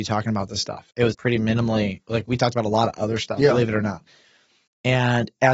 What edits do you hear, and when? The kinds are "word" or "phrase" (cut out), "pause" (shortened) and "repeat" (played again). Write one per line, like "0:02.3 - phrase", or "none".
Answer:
0:01.1 - word

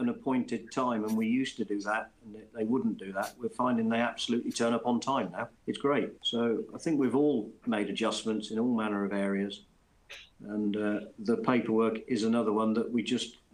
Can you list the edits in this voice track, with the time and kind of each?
0:05.6 - pause
0:06.2 - pause

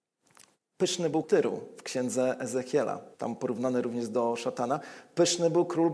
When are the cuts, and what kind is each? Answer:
0:01.2 - word
0:03.1 - pause

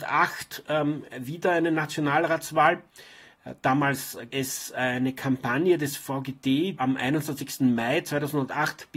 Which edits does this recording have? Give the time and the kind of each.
0:04.3 - word
0:06.8 - word

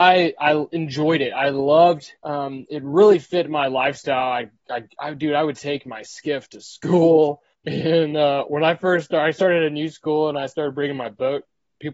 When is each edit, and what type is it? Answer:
0:02.2 - pause
0:07.5 - pause

